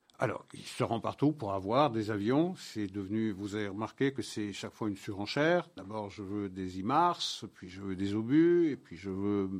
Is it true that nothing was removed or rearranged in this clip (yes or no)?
yes